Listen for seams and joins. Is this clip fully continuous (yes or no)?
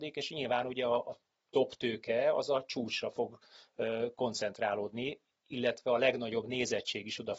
yes